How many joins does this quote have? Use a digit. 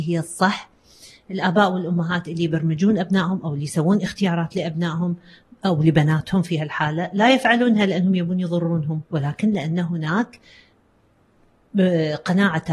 1